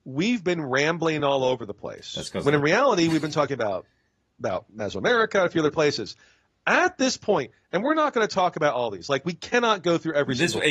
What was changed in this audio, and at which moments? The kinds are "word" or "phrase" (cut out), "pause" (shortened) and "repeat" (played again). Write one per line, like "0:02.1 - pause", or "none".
none